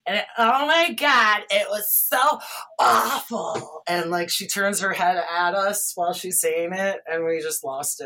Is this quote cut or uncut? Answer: uncut